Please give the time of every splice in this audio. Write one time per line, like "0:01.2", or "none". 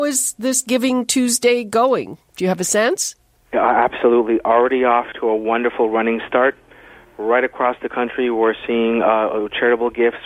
none